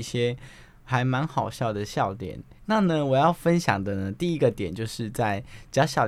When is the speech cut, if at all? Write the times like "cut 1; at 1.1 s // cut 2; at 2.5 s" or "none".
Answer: cut 1; at 2.6 s